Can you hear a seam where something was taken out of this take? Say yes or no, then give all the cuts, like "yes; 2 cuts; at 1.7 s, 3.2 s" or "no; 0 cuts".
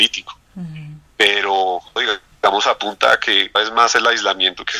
yes; 2 cuts; at 2.0 s, 3.6 s